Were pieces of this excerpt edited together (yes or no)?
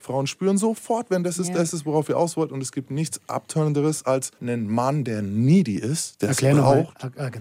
yes